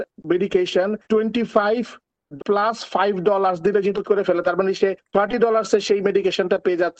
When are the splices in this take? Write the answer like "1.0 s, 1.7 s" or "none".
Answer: 1.0 s, 2.4 s, 4.0 s

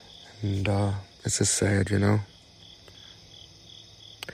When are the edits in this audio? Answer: 1.1 s

